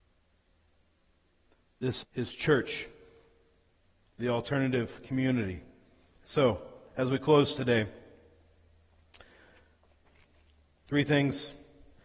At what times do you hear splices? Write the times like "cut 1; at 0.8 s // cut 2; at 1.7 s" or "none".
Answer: cut 1; at 2.0 s